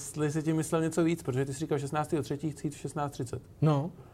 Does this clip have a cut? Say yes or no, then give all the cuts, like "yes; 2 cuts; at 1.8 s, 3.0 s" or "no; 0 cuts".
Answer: no; 0 cuts